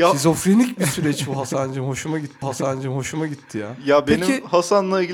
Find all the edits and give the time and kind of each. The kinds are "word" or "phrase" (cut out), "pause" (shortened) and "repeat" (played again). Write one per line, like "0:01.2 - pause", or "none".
0:02.4 - repeat